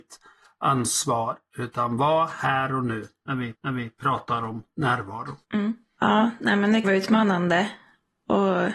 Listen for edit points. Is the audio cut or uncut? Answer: cut